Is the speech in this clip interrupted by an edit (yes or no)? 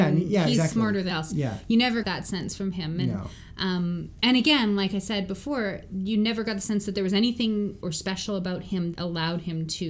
yes